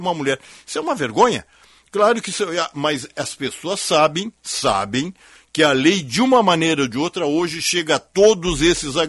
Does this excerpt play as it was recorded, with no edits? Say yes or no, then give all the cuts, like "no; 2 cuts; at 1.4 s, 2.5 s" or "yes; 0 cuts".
yes; 0 cuts